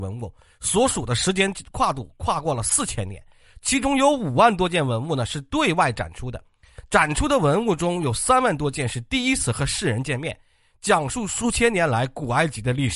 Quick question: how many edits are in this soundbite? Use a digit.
0